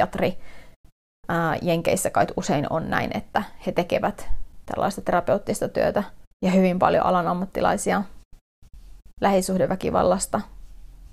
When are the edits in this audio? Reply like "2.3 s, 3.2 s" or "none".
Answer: 6.3 s